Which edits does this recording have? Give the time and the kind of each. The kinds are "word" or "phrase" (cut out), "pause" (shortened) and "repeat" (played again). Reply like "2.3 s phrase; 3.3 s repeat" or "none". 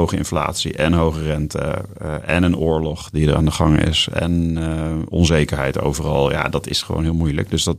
none